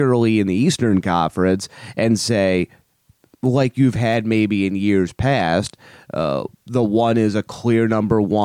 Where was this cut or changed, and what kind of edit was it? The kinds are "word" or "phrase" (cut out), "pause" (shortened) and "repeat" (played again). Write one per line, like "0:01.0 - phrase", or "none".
none

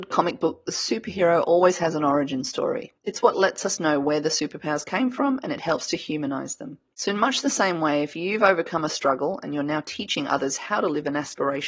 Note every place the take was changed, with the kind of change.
0:03.0 - pause
0:06.9 - pause

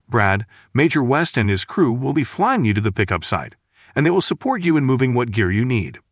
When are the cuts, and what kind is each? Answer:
none

